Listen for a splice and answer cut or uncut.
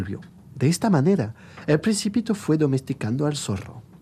uncut